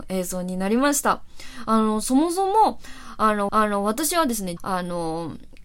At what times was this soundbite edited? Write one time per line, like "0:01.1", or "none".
0:03.5
0:04.6